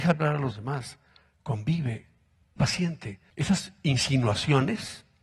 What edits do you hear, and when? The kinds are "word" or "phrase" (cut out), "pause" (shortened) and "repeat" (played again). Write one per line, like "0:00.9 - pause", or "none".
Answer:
0:02.6 - word
0:03.3 - pause